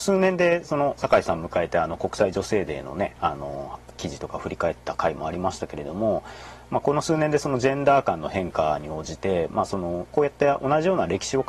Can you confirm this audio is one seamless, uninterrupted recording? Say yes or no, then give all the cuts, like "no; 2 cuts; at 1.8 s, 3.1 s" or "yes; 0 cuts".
no; 2 cuts; at 1.0 s, 10.1 s